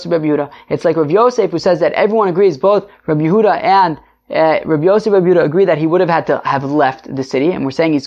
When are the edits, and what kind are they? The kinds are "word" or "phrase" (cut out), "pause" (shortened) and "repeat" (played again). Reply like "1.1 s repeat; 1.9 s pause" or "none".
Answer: none

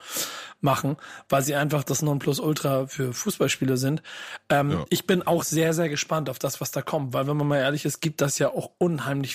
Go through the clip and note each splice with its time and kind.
none

